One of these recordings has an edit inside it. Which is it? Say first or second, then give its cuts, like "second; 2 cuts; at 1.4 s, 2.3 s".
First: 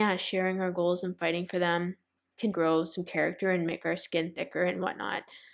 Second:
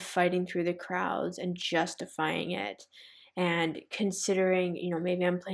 first; 1 cut; at 2.5 s